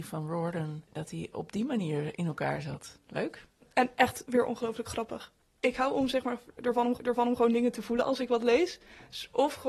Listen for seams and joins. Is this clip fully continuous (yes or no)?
no